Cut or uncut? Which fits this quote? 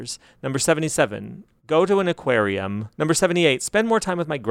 cut